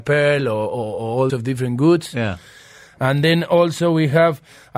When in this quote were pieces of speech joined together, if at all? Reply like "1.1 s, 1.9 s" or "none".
1.3 s